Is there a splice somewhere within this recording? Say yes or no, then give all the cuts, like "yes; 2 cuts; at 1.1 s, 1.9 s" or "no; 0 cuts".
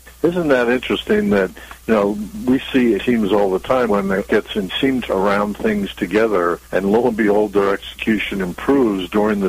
yes; 6 cuts; at 3.0 s, 3.9 s, 4.3 s, 4.7 s, 5.1 s, 6.6 s